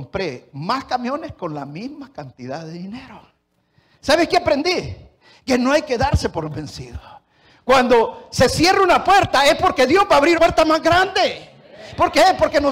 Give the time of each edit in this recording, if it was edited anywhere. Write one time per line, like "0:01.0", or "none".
0:10.3